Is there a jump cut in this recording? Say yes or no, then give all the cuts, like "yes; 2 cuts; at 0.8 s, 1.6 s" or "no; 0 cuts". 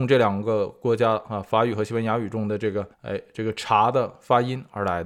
yes; 1 cut; at 2.9 s